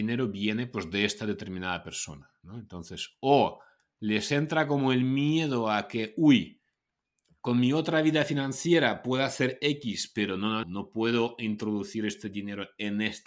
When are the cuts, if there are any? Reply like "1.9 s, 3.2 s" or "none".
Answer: 10.6 s